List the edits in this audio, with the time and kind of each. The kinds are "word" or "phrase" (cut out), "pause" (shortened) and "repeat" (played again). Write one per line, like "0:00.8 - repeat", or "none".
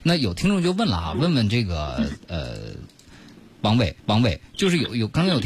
0:04.0 - repeat